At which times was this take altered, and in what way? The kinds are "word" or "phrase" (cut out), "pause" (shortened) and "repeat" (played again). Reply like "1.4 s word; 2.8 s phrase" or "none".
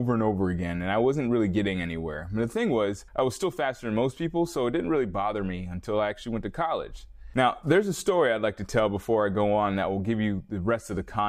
3.1 s pause